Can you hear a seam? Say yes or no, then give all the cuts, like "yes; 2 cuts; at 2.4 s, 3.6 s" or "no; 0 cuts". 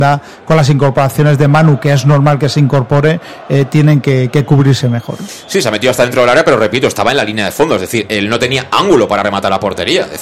no; 0 cuts